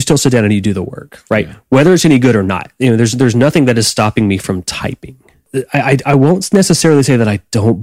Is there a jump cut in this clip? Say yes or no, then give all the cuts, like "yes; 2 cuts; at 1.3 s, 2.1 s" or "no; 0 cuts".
no; 0 cuts